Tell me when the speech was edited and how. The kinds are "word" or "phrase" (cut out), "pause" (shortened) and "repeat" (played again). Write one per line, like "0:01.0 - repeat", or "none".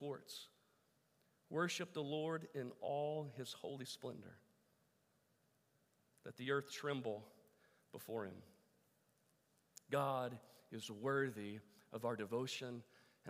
none

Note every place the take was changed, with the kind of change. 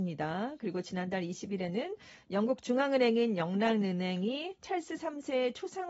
none

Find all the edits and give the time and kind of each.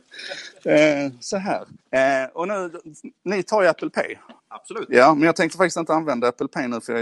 0:01.8 - pause
0:04.4 - pause

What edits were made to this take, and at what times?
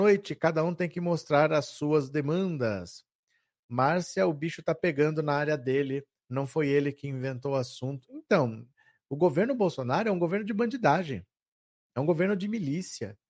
none

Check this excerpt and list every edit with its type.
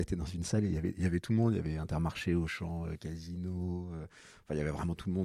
none

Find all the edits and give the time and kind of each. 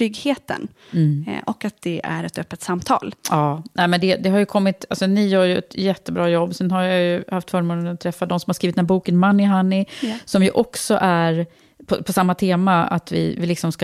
none

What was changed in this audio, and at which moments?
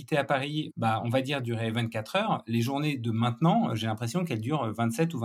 none

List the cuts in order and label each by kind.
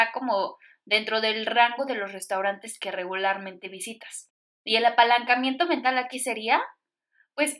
none

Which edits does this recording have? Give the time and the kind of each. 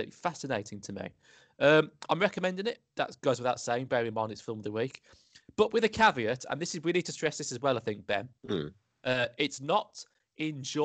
0:02.9 - pause
0:08.4 - pause

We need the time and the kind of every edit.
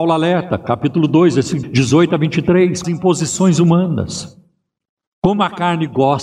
0:01.6 - word
0:02.8 - phrase

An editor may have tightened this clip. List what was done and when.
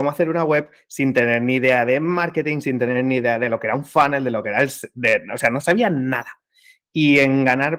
none

